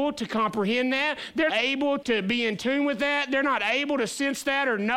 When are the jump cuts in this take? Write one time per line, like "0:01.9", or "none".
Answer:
0:01.5
0:02.0